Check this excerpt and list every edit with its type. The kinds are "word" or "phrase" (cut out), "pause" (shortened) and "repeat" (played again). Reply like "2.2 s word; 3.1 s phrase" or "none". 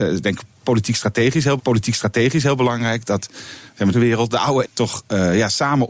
1.6 s repeat; 3.9 s phrase; 4.6 s word